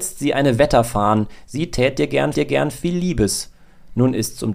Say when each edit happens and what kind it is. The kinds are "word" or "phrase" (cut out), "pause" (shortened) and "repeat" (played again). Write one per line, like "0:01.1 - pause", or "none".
0:02.3 - repeat